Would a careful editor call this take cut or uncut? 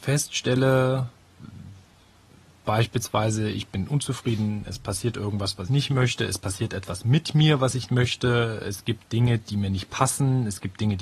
cut